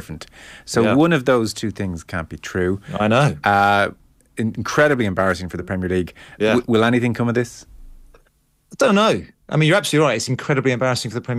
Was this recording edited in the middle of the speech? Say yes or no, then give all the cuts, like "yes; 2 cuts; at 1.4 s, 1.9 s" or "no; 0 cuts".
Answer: no; 0 cuts